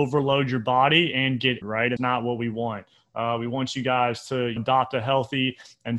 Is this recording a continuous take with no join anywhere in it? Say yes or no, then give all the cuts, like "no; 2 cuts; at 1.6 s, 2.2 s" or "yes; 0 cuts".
no; 3 cuts; at 1.6 s, 2.0 s, 4.6 s